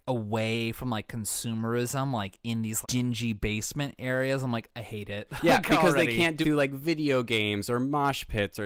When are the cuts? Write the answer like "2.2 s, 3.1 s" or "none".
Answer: 2.8 s, 6.4 s

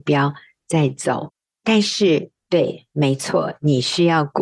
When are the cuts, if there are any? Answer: none

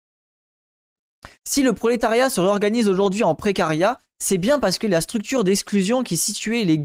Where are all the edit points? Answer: 1.3 s

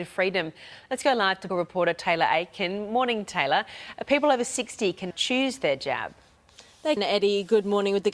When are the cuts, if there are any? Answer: 1.5 s, 5.1 s, 7.0 s

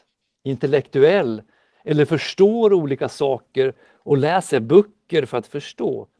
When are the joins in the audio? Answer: none

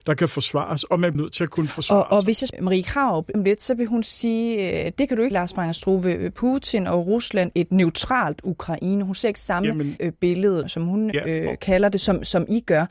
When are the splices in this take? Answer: 1.1 s, 2.5 s, 3.3 s, 5.3 s, 7.5 s, 10.0 s, 10.6 s, 11.1 s

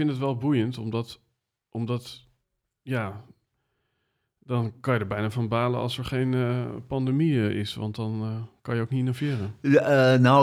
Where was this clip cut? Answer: none

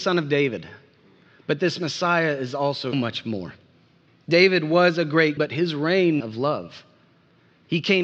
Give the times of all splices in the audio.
2.9 s, 4.1 s, 5.4 s, 6.2 s

